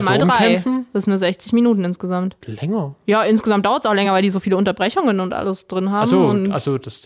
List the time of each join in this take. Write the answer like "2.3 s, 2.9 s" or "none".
none